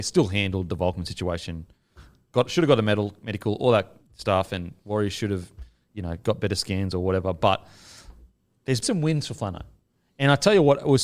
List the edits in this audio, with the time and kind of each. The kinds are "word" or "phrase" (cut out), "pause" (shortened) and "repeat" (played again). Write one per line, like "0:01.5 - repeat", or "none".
0:08.8 - word